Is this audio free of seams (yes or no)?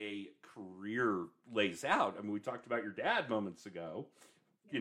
yes